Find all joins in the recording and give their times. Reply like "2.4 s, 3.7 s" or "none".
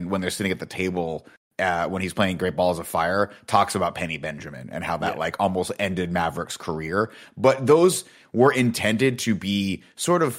none